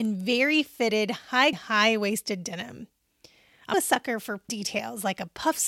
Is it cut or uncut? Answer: cut